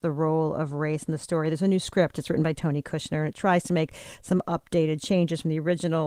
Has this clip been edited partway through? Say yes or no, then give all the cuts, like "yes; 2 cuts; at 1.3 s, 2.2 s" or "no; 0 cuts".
no; 0 cuts